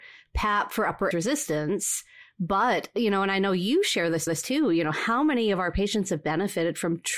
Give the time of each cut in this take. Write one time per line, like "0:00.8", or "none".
0:01.1
0:04.3